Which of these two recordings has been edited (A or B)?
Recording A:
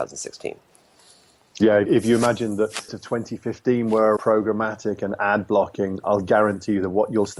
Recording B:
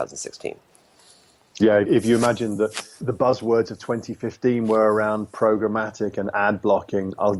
A